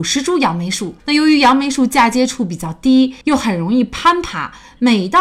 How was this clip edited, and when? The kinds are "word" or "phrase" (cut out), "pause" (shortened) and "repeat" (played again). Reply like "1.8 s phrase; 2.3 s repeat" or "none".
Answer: 1.0 s pause; 3.2 s pause